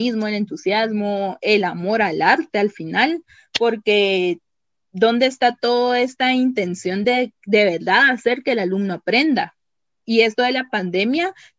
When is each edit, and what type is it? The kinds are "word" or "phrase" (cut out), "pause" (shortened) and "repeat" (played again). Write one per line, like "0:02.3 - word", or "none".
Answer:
none